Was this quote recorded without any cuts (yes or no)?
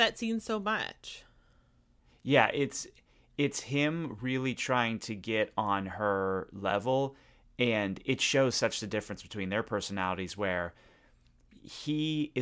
yes